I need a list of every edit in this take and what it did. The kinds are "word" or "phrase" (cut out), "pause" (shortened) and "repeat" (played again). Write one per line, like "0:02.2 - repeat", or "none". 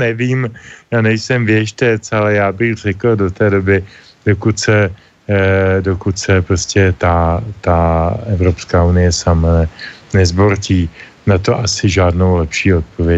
none

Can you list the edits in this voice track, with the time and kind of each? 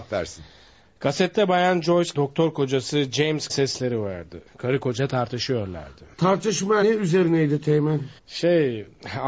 0:02.1 - phrase
0:03.5 - word
0:04.5 - pause
0:06.8 - word
0:08.2 - pause

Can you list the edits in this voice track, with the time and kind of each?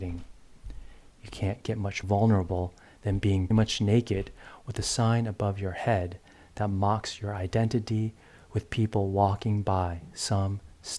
0:02.0 - word
0:03.5 - word

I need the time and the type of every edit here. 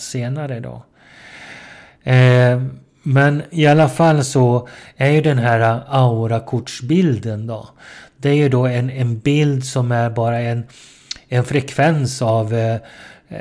none

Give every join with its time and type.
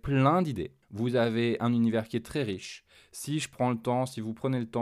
none

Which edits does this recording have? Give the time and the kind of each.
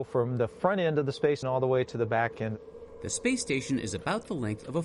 0:01.4 - word

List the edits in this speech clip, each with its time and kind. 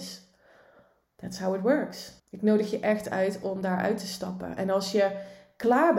0:02.2 - pause

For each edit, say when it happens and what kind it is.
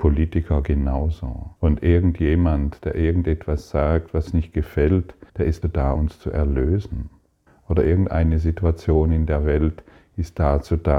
0:01.6 - pause
0:04.3 - word
0:05.3 - pause
0:05.6 - word
0:06.0 - word
0:07.5 - pause

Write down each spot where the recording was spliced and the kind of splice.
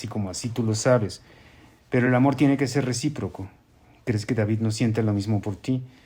none

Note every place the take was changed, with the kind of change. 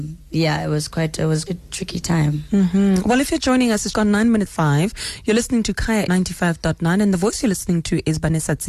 0:01.5 - word
0:03.4 - word
0:03.9 - word
0:04.5 - word
0:06.1 - word

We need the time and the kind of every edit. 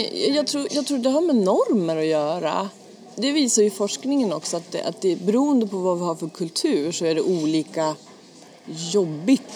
none

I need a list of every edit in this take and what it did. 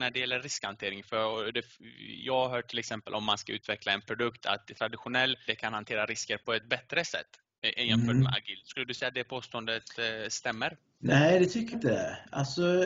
0:05.5 - word
0:11.7 - word

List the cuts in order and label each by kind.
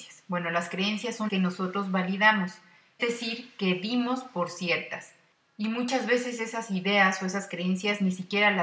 0:01.3 - word
0:03.0 - word

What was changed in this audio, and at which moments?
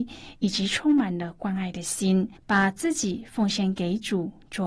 0:02.4 - pause

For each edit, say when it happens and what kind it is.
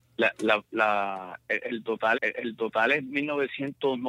0:02.1 - repeat

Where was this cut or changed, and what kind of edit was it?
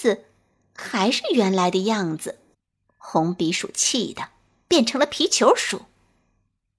0:02.5 - pause

